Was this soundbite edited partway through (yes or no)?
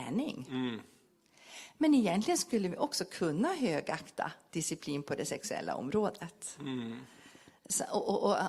no